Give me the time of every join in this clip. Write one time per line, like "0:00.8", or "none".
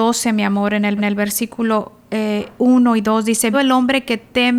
0:01.0
0:03.5